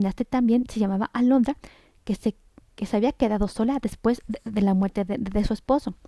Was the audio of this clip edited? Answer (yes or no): no